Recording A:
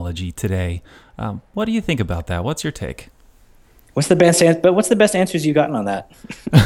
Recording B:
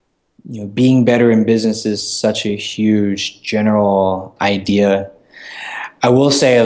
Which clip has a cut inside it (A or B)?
B